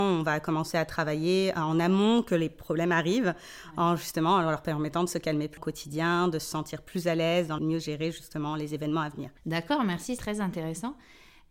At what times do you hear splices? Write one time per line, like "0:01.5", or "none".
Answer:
0:05.6
0:07.6
0:09.4
0:10.2